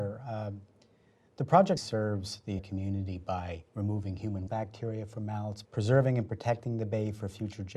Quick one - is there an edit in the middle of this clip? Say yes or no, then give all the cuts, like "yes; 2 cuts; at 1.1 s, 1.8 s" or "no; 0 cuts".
yes; 5 cuts; at 1.8 s, 2.6 s, 3.7 s, 4.5 s, 5.6 s